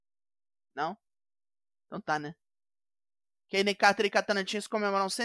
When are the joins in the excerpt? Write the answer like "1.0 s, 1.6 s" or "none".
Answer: none